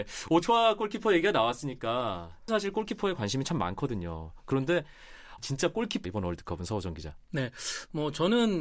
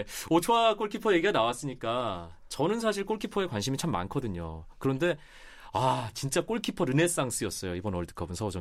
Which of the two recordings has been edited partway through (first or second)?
first